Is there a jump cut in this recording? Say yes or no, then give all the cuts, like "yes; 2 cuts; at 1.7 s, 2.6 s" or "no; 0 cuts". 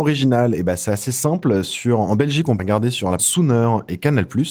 yes; 2 cuts; at 2.6 s, 3.2 s